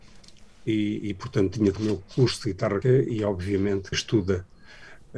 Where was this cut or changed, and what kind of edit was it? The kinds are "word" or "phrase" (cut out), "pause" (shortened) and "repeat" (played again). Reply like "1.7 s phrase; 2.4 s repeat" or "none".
1.8 s word; 2.8 s word; 3.9 s word